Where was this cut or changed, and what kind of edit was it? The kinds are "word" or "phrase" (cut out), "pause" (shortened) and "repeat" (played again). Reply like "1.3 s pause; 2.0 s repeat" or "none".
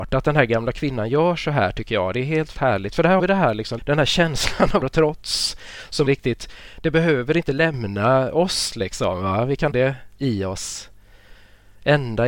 2.5 s word; 3.2 s word; 3.8 s word; 4.8 s word; 6.0 s word; 9.7 s word